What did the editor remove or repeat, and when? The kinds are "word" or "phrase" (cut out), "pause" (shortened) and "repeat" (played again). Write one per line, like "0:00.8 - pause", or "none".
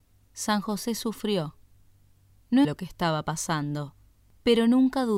0:02.6 - word